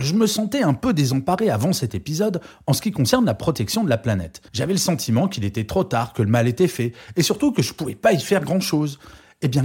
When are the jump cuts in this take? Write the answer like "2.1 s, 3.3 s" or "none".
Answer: 4.5 s

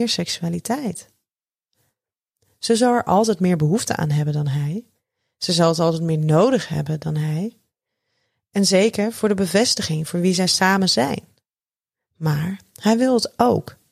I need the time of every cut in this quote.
none

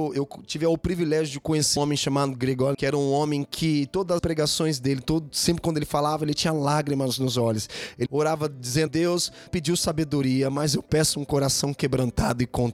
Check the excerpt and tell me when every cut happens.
1.8 s, 2.7 s, 4.2 s, 8.1 s, 8.9 s, 9.5 s

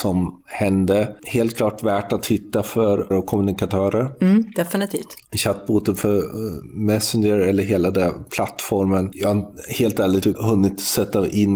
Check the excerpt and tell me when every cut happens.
3.1 s, 10.2 s

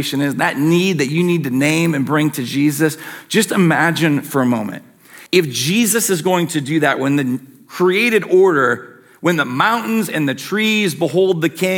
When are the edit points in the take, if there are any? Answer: 5.3 s

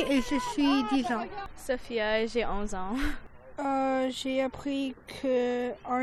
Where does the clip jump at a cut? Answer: none

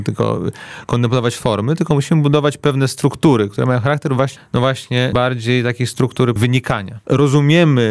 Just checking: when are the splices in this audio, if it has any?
4.4 s, 6.4 s

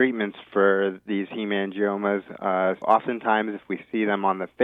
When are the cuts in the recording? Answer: 2.8 s

